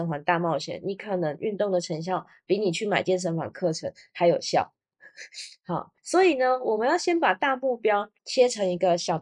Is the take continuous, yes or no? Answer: no